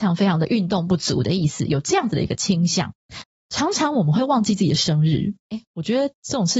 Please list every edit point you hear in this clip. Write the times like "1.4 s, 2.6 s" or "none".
5.4 s